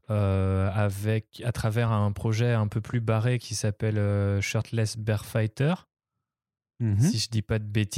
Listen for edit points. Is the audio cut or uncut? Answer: uncut